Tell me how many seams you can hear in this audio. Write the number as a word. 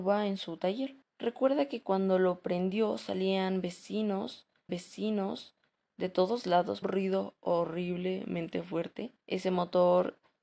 four